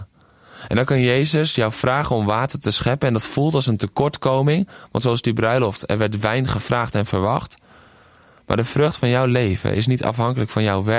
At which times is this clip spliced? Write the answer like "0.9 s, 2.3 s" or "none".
none